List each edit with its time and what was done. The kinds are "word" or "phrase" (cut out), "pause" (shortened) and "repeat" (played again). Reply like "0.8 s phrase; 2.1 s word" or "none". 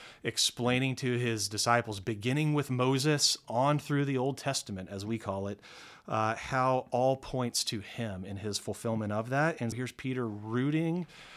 9.7 s word

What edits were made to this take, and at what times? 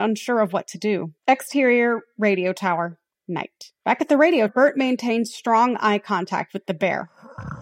1.2 s pause; 3.8 s pause; 4.5 s word

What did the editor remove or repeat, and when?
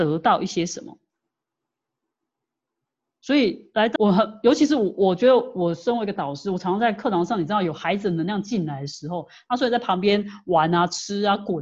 4.0 s word

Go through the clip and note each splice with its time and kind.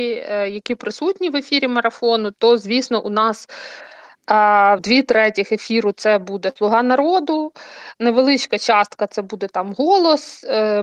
4.8 s word

